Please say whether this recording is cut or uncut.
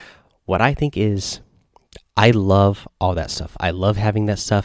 uncut